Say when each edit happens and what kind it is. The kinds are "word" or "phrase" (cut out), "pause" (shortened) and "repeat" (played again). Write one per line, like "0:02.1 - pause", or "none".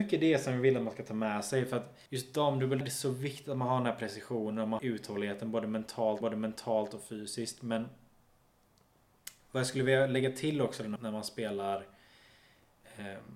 0:02.1 - pause
0:02.8 - word
0:04.8 - word
0:06.2 - repeat
0:11.0 - word